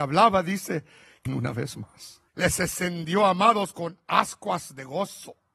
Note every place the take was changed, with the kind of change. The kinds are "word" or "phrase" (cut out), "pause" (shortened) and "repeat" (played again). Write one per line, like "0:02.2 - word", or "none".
0:01.3 - phrase
0:02.3 - pause

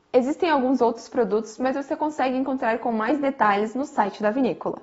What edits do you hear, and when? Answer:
none

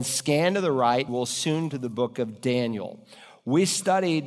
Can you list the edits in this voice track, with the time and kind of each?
0:01.1 - word
0:01.7 - word

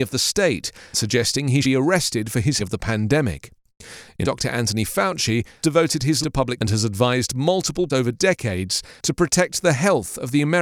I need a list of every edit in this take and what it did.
0:00.9 - word
0:01.6 - word
0:02.6 - word
0:04.2 - word
0:05.6 - word
0:06.2 - word
0:06.6 - word
0:07.9 - word

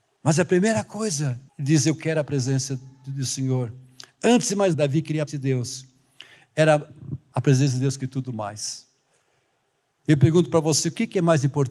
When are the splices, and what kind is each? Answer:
0:01.5 - pause
0:04.7 - word
0:05.3 - word
0:07.3 - phrase

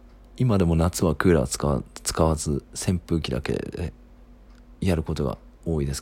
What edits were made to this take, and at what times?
0:02.7 - pause
0:04.8 - pause

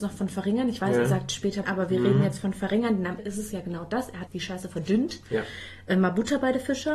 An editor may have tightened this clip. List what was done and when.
0:01.6 - word
0:03.2 - word
0:04.3 - word

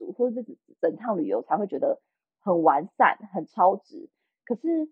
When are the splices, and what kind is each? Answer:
none

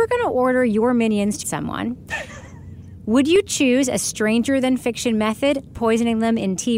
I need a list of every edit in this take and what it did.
0:01.4 - word
0:05.7 - word

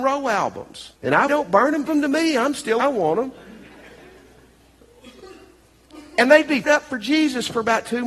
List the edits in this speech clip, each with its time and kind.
0:00.9 - pause
0:01.3 - phrase
0:01.9 - word
0:02.8 - phrase
0:06.6 - word

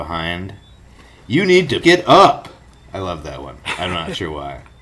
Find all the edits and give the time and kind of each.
0:01.8 - word

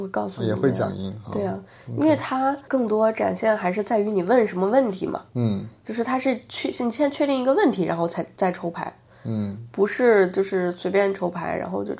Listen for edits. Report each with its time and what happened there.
0:05.3 - pause

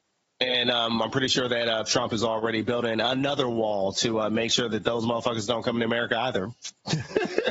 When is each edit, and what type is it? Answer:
none

